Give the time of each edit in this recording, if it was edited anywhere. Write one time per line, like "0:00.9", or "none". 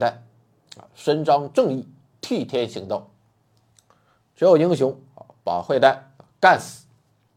none

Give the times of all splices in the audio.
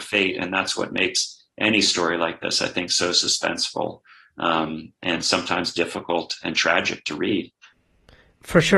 none

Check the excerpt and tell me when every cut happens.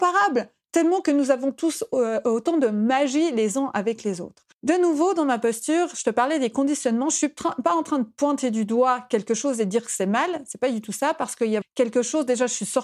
0:04.5
0:11.6

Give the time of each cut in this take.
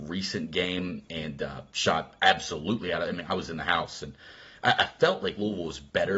none

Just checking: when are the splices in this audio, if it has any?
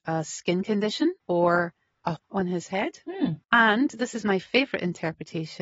0:01.2
0:02.2
0:03.4

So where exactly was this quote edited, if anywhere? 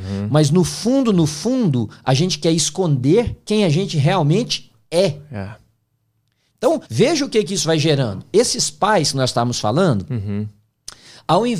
0:06.9

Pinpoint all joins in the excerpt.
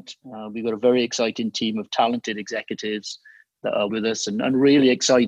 0:03.9

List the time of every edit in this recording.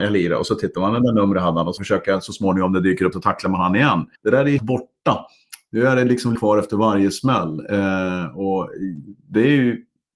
0:01.8
0:03.1
0:04.2
0:04.6
0:06.4
0:09.2

